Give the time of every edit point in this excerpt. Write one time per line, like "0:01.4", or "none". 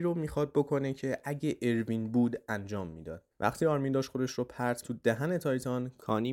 0:03.3
0:04.8

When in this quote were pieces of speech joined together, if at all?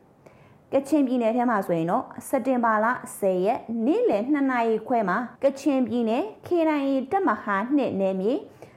0:05.4

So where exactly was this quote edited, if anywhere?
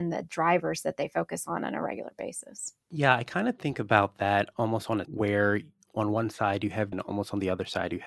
0:05.0
0:06.9

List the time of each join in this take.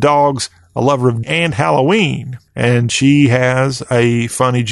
0:01.2
0:02.5

